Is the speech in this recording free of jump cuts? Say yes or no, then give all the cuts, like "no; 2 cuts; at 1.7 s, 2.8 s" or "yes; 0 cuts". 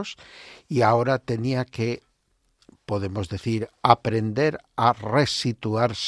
yes; 0 cuts